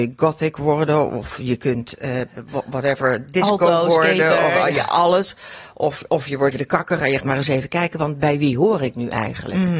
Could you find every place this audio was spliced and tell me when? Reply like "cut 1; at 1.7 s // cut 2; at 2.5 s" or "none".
cut 1; at 6.5 s // cut 2; at 7.2 s

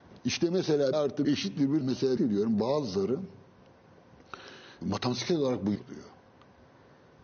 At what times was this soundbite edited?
cut 1; at 0.9 s // cut 2; at 1.2 s // cut 3; at 1.8 s // cut 4; at 2.2 s // cut 5; at 4.8 s // cut 6; at 5.7 s

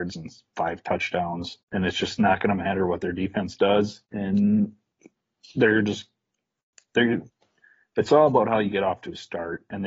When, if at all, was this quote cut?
cut 1; at 1.6 s // cut 2; at 4.0 s

